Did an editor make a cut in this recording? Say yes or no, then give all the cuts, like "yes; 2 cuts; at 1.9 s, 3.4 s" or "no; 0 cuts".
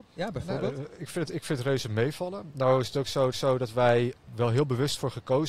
yes; 2 cuts; at 3.3 s, 4.3 s